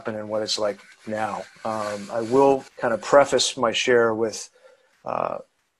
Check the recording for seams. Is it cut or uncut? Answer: cut